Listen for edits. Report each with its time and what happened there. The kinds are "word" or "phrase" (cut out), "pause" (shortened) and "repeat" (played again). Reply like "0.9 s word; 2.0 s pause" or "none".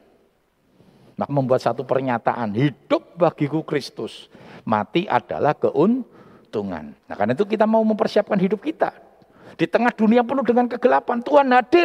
1.3 s word; 7.0 s pause